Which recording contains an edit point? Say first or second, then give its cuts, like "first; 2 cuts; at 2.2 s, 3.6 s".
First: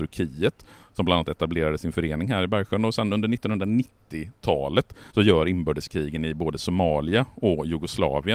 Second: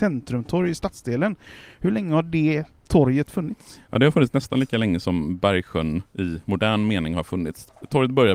first; 1 cut; at 5.1 s